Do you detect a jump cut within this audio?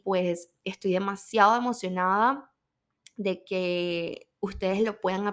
no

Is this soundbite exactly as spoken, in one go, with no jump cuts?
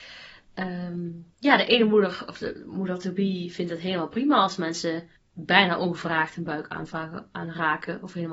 no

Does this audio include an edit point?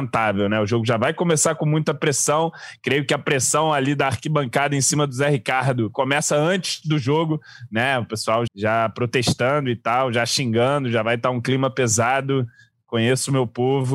yes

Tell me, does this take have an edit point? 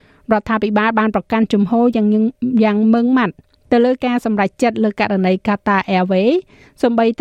no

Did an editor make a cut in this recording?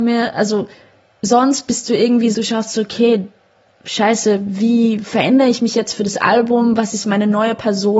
yes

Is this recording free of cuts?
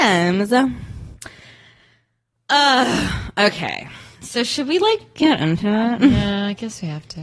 yes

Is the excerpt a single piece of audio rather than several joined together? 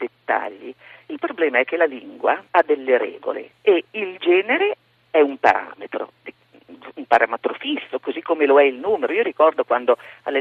no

